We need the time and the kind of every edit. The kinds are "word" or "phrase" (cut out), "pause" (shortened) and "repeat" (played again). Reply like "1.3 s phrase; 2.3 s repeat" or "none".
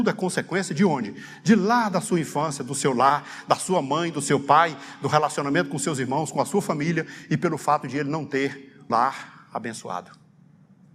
8.9 s word